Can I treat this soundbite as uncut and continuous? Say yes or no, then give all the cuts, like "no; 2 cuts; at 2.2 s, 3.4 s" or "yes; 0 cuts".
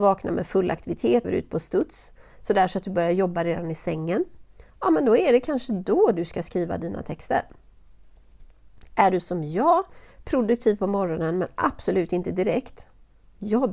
no; 2 cuts; at 1.2 s, 4.7 s